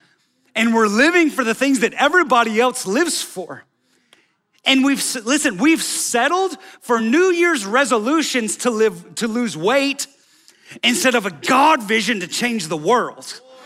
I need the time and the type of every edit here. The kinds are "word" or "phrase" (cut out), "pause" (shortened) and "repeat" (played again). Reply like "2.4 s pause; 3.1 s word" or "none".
none